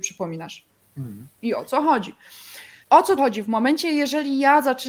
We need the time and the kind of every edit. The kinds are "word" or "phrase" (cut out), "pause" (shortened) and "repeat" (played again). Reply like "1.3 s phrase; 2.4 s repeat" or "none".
1.3 s pause; 2.8 s pause; 3.2 s word